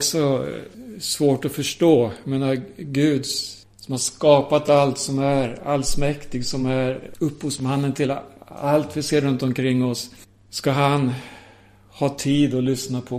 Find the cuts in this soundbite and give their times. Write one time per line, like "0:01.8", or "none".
none